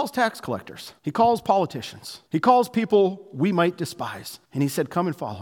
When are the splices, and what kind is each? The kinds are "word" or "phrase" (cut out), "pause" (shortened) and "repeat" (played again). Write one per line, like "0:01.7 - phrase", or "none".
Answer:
0:01.0 - pause
0:02.3 - pause
0:04.4 - pause